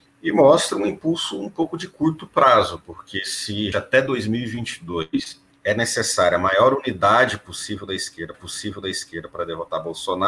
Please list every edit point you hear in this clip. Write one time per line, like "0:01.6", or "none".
0:03.7
0:05.5
0:08.3